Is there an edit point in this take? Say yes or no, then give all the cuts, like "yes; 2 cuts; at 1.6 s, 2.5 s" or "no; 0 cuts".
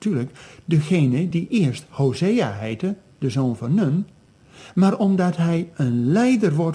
no; 0 cuts